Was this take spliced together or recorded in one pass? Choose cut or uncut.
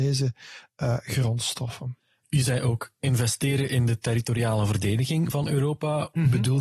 uncut